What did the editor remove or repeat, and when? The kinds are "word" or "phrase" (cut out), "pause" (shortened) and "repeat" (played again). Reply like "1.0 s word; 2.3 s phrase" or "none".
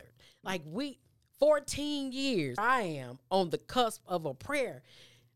2.6 s word